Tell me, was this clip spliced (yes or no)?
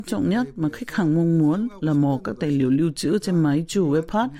no